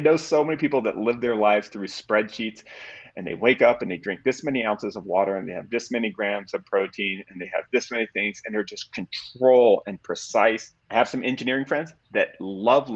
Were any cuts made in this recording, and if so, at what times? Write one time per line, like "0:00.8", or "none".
0:10.8